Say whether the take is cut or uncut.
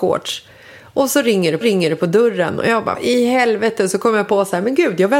cut